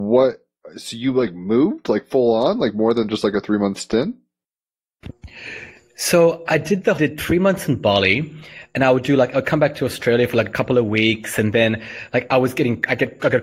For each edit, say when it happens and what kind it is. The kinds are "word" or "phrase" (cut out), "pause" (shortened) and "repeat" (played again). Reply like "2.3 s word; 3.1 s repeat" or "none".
7.0 s phrase